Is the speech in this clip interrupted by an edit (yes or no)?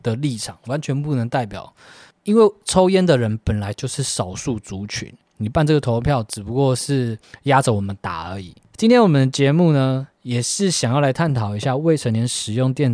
yes